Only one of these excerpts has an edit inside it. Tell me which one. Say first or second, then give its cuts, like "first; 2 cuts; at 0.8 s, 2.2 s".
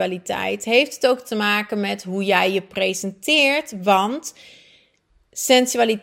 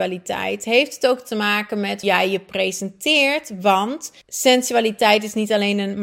second; 2 cuts; at 2.0 s, 4.2 s